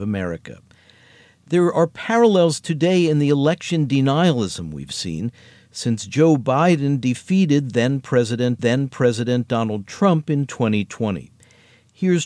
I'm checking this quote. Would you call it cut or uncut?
cut